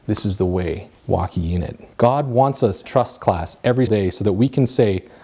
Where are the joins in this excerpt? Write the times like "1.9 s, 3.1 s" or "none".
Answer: 1.0 s, 1.9 s, 2.8 s, 3.9 s